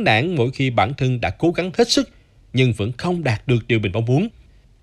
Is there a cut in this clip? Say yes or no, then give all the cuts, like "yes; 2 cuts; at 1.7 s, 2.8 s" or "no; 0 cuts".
no; 0 cuts